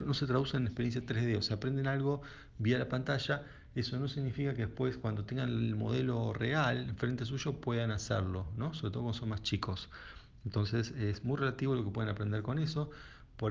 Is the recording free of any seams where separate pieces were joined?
yes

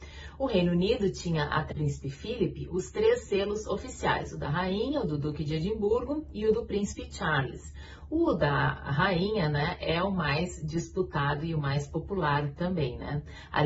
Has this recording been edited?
yes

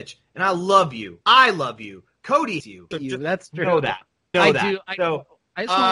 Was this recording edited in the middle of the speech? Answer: yes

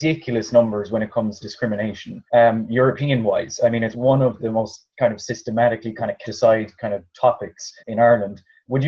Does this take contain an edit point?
yes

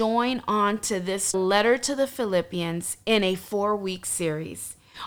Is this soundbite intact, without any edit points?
no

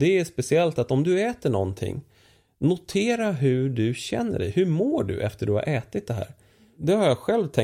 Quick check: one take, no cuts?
yes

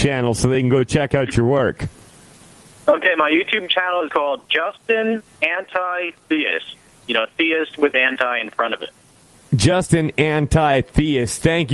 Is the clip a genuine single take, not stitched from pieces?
no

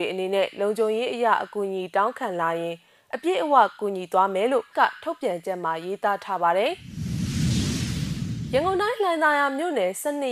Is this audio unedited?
no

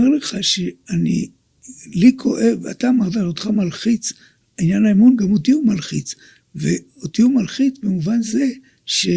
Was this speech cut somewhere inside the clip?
no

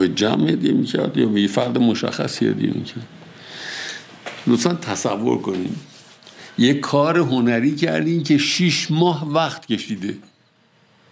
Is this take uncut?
yes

